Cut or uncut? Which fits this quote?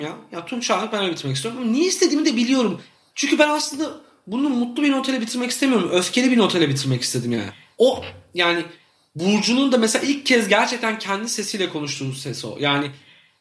uncut